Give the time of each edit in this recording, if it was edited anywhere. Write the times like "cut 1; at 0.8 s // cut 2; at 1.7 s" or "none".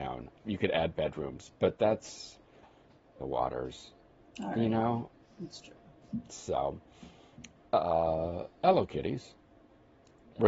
cut 1; at 3.2 s